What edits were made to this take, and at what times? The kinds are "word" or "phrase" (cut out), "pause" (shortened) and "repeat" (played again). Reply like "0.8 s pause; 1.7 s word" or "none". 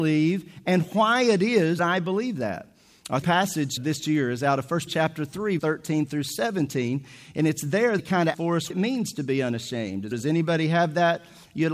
1.8 s word; 3.2 s word; 3.8 s word; 4.9 s word; 5.6 s word; 8.0 s word; 8.3 s word; 8.7 s word; 10.1 s word